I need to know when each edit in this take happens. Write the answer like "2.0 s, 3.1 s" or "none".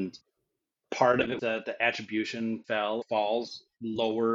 1.4 s, 2.6 s, 3.0 s